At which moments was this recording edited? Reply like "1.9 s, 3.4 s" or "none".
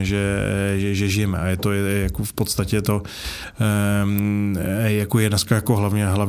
none